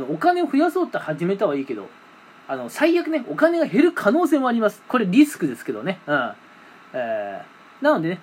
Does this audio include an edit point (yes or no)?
no